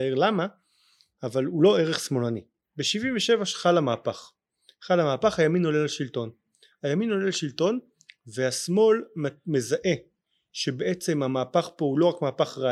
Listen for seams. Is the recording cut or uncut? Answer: uncut